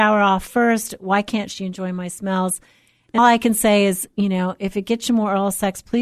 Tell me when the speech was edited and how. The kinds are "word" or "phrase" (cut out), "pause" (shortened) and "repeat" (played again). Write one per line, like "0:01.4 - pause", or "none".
0:03.2 - word